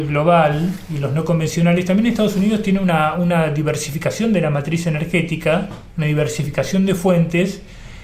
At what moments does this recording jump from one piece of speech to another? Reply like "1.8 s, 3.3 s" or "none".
5.9 s